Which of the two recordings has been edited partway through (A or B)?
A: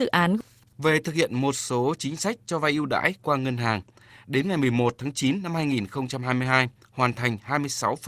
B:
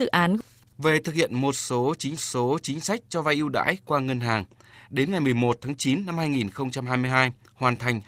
B